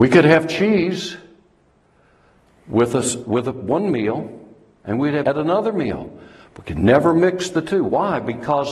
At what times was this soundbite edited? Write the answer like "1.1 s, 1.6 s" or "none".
5.2 s